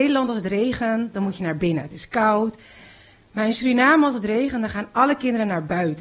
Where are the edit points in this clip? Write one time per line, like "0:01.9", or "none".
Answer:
none